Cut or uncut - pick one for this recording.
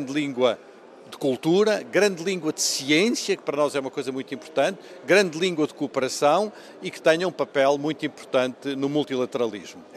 uncut